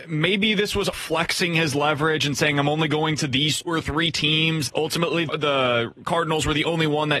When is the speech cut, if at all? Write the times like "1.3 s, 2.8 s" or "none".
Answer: 0.9 s, 3.7 s, 4.7 s, 5.3 s